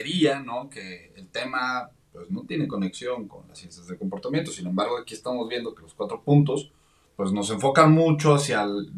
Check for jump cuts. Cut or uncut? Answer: uncut